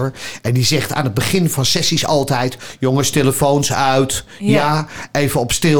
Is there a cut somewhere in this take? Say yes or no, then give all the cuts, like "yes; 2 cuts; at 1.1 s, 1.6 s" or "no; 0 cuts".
no; 0 cuts